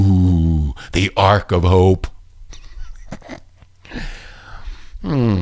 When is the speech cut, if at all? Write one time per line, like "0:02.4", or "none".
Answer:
none